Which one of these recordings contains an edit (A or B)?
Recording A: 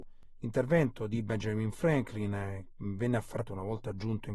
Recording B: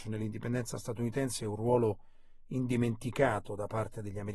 A